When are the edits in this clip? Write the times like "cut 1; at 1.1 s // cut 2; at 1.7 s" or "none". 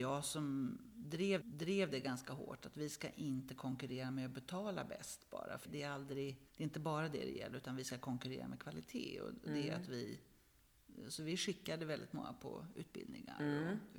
cut 1; at 1.4 s // cut 2; at 5.6 s // cut 3; at 6.5 s